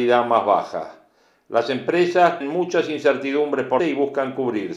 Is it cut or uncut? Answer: cut